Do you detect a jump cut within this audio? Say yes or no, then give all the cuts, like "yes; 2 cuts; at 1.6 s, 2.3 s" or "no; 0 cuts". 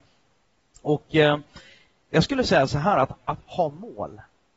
no; 0 cuts